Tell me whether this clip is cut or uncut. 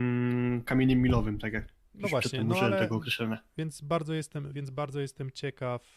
uncut